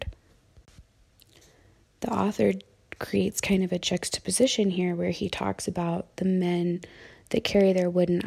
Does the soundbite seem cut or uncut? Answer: uncut